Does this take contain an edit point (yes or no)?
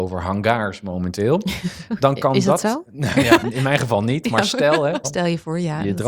yes